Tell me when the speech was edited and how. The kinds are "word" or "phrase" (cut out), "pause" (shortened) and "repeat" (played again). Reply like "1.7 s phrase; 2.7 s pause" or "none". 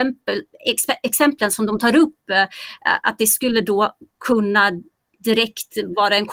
none